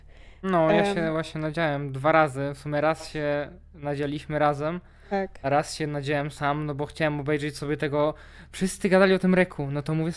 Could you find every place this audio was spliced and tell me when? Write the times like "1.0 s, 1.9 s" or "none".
none